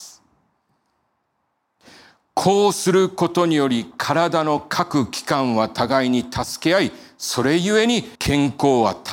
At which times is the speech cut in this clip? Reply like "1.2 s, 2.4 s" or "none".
8.2 s